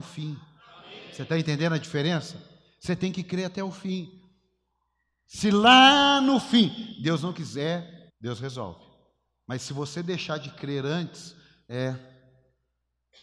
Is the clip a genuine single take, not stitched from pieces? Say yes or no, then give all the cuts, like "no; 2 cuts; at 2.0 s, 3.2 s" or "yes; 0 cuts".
no; 1 cut; at 8.1 s